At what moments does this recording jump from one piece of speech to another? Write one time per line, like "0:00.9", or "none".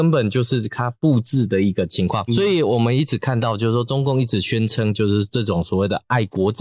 0:02.3